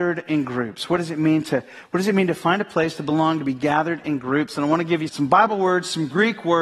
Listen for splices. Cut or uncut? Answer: cut